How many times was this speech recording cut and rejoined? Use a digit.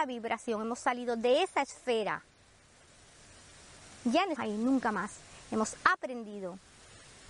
1